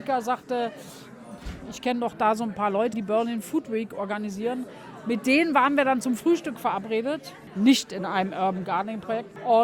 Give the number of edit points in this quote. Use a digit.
1